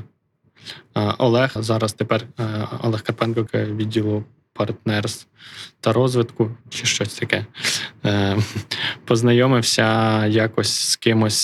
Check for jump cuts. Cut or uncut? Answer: cut